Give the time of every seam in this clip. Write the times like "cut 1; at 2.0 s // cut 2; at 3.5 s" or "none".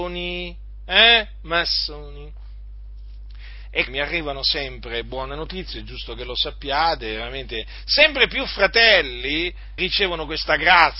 cut 1; at 3.9 s // cut 2; at 9.8 s